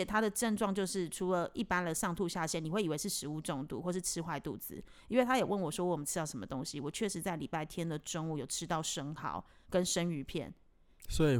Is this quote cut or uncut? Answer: uncut